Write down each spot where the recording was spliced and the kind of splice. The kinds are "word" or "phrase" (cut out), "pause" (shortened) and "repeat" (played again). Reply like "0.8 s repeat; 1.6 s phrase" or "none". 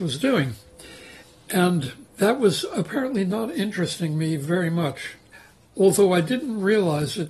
2.1 s pause